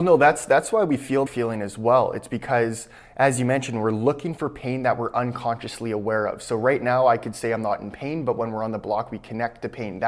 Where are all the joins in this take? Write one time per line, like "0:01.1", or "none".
0:01.3